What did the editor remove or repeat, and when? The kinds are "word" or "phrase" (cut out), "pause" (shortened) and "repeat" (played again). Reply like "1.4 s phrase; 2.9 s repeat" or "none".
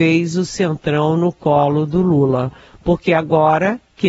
none